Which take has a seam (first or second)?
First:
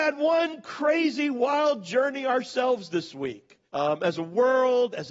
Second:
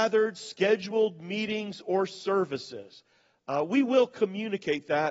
first